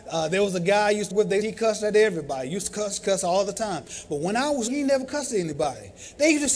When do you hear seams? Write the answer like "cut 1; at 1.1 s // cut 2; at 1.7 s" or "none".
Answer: cut 1; at 1.1 s // cut 2; at 1.4 s // cut 3; at 3.0 s // cut 4; at 4.7 s

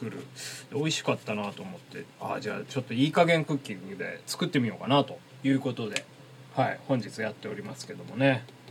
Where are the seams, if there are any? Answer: none

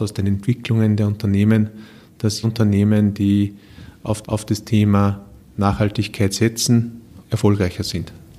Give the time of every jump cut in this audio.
cut 1; at 2.4 s // cut 2; at 4.2 s // cut 3; at 5.4 s // cut 4; at 7.2 s

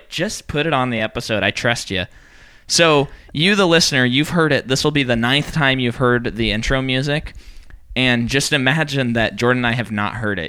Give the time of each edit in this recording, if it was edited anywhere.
none

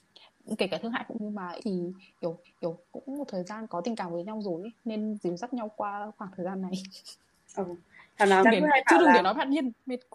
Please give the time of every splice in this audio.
cut 1; at 1.2 s // cut 2; at 1.6 s // cut 3; at 2.4 s // cut 4; at 8.4 s

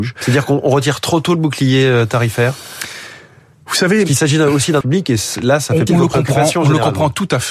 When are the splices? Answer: cut 1; at 4.8 s // cut 2; at 5.9 s

